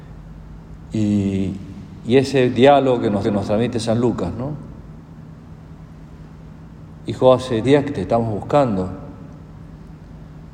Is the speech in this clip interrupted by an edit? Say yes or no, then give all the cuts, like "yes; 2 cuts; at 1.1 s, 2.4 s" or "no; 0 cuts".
yes; 2 cuts; at 3.2 s, 7.6 s